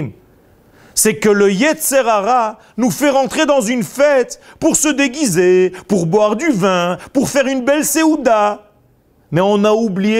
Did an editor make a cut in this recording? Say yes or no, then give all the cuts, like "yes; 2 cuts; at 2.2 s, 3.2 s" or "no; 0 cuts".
no; 0 cuts